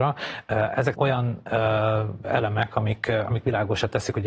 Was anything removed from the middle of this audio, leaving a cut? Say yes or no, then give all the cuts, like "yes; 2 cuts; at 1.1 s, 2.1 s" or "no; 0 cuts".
yes; 2 cuts; at 0.9 s, 2.2 s